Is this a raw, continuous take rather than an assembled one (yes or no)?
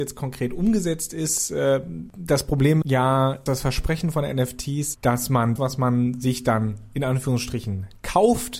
no